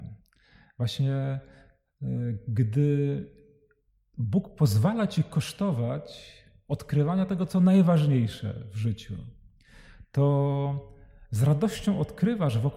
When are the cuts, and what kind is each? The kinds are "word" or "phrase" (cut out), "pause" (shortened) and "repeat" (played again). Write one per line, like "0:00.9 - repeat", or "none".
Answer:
none